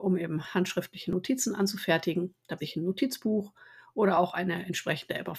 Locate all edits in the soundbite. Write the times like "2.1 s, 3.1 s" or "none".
2.6 s

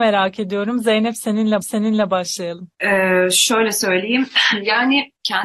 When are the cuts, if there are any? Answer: 1.6 s

